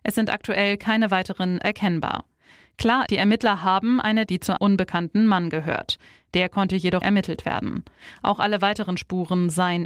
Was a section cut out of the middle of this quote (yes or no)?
yes